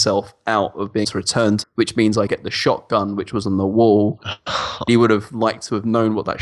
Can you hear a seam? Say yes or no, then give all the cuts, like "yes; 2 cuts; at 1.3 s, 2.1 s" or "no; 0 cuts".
yes; 4 cuts; at 1.0 s, 1.6 s, 2.3 s, 4.9 s